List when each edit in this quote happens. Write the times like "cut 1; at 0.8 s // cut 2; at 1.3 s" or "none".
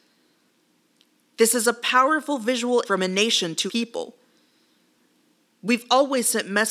cut 1; at 2.8 s // cut 2; at 3.7 s